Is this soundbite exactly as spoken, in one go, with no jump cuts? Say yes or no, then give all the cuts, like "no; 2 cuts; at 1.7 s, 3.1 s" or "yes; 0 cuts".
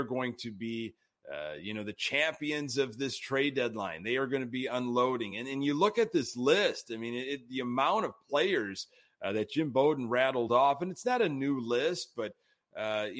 yes; 0 cuts